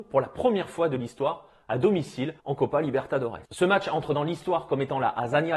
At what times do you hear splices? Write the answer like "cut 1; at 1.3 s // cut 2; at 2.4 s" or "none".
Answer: cut 1; at 2.4 s // cut 2; at 3.5 s